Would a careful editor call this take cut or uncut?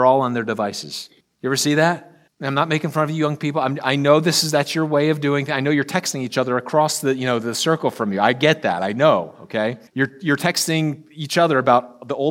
cut